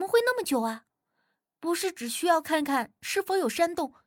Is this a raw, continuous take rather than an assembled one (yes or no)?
yes